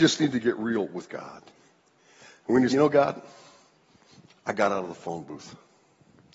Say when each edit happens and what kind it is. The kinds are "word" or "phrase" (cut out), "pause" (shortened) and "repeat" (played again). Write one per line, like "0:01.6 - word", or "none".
0:02.7 - word